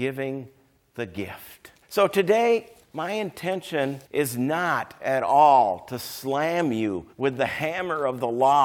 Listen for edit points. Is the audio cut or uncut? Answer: cut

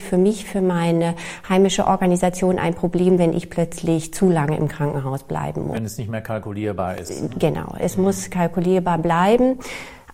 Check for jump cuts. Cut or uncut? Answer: uncut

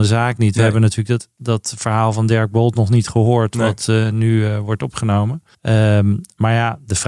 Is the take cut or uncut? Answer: cut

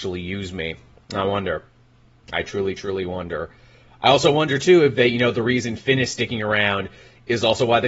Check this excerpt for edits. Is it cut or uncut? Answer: uncut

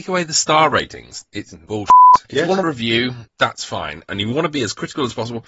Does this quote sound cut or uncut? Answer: cut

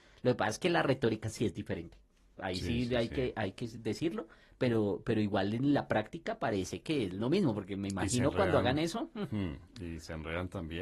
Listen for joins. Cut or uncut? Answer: uncut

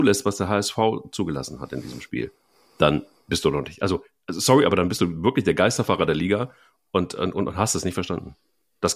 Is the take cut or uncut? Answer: uncut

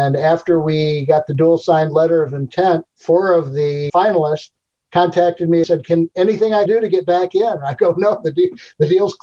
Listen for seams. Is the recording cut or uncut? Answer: cut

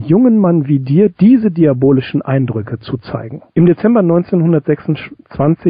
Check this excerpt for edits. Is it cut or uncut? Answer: uncut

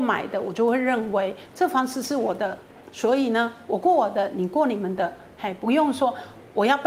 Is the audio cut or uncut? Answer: uncut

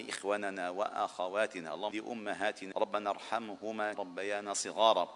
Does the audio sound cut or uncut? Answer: cut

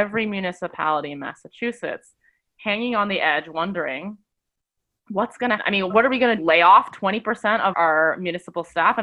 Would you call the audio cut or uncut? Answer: cut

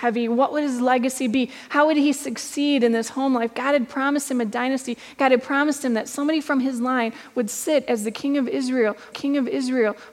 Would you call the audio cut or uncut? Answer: cut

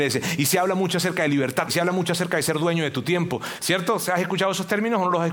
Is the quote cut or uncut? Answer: cut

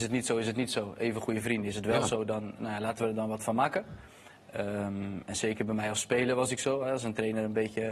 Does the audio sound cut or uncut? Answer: uncut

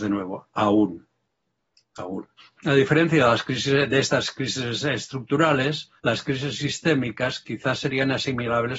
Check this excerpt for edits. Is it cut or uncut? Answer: cut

